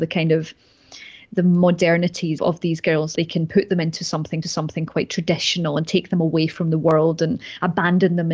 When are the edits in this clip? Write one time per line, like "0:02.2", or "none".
0:02.4
0:03.2
0:04.4